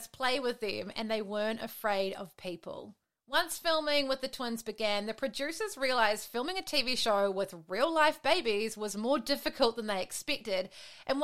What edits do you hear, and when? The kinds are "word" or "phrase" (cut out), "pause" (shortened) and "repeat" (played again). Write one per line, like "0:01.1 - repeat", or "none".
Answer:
none